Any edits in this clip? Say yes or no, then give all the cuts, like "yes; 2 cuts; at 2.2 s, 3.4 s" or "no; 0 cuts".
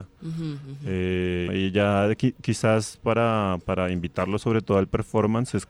yes; 1 cut; at 1.5 s